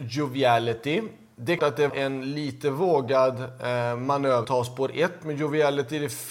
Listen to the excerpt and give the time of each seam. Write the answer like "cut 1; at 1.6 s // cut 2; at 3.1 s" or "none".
cut 1; at 1.6 s // cut 2; at 1.9 s // cut 3; at 4.4 s